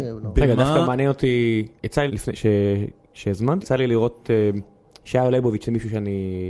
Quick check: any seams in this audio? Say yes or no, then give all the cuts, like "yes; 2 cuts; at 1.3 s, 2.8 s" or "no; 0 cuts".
yes; 3 cuts; at 1.8 s, 2.1 s, 3.6 s